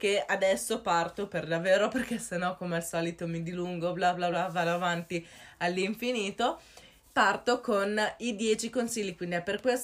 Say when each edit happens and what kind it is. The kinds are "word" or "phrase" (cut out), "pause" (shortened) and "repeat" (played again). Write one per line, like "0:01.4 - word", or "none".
0:04.3 - word